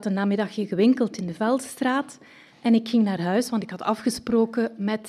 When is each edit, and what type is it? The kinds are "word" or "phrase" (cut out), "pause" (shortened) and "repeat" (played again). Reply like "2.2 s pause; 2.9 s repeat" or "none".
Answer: 2.5 s word